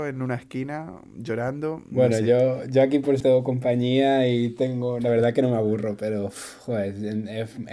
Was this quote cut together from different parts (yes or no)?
yes